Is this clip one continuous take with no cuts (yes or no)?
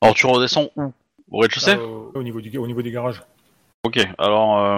no